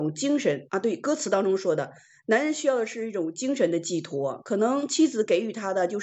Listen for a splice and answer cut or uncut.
uncut